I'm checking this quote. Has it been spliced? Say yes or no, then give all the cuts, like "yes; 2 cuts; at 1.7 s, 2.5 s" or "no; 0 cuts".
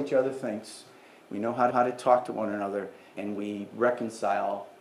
yes; 2 cuts; at 1.7 s, 3.1 s